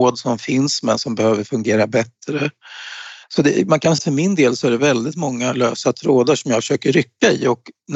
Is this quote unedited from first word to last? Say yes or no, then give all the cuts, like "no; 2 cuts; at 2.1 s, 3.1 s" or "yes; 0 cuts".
no; 2 cuts; at 3.2 s, 4.0 s